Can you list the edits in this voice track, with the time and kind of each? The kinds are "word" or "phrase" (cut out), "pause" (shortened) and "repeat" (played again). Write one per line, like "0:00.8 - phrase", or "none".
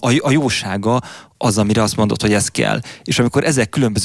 none